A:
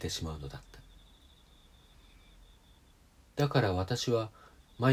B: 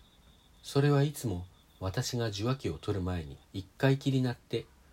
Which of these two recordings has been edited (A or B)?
B